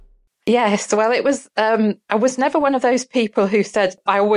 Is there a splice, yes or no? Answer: yes